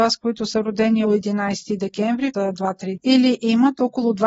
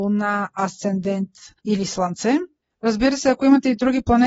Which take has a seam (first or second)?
first